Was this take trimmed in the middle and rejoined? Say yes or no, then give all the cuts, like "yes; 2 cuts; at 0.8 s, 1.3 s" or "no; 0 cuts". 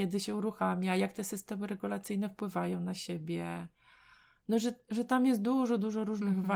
no; 0 cuts